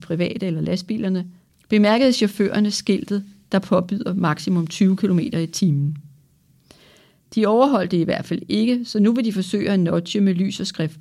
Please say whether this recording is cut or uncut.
uncut